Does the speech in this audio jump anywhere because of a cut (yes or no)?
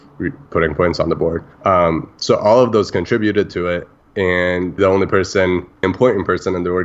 yes